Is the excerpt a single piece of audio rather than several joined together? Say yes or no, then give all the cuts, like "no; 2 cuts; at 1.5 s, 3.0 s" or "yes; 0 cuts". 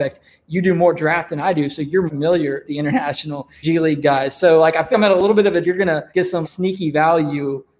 no; 7 cuts; at 2.1 s, 2.6 s, 3.6 s, 4.9 s, 5.6 s, 6.1 s, 6.4 s